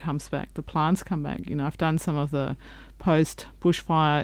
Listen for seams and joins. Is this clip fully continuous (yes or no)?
yes